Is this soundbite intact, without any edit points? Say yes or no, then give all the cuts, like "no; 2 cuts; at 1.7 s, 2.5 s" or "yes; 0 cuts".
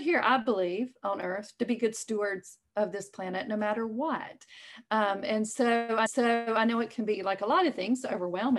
no; 1 cut; at 6.1 s